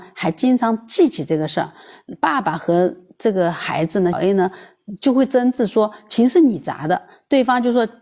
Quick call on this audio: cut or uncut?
cut